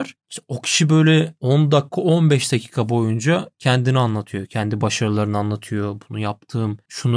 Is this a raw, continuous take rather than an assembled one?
yes; 0 cuts

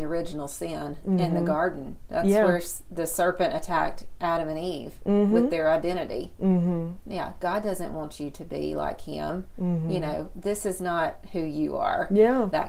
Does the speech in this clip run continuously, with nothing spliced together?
yes; 0 cuts

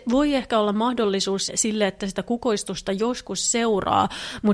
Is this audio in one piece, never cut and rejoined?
no; 1 cut; at 1.5 s

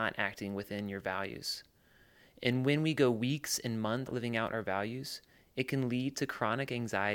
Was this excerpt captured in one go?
no; 1 cut; at 4.1 s

